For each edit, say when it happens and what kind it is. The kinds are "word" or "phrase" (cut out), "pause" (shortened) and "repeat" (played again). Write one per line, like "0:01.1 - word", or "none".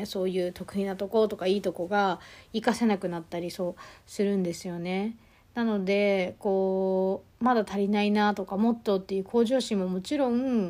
none